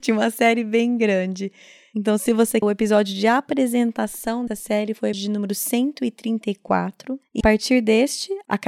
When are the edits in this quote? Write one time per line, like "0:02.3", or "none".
0:02.6
0:04.5
0:05.1
0:07.4